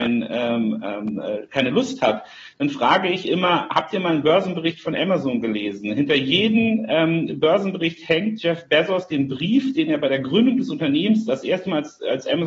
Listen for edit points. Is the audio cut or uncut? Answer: uncut